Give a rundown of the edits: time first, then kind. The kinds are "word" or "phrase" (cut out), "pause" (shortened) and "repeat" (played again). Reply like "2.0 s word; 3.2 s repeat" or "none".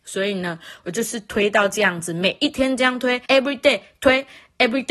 3.3 s pause